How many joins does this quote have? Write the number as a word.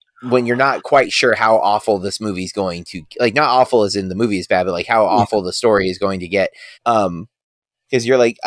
one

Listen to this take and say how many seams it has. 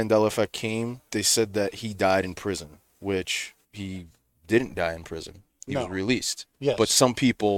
two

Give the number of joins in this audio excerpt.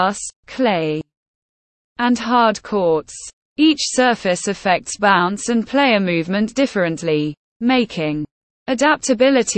one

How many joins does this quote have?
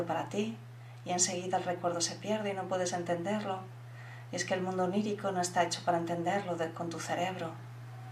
zero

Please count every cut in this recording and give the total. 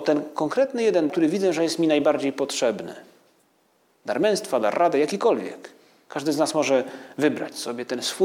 one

